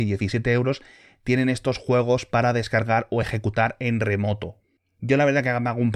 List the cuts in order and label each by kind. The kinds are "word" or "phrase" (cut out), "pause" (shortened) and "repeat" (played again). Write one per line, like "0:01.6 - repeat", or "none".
none